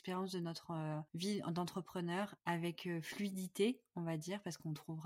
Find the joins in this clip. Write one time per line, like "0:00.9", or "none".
0:01.1
0:02.4